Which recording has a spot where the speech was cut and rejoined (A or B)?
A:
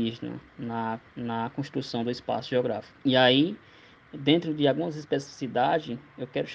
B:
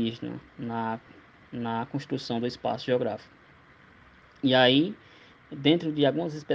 A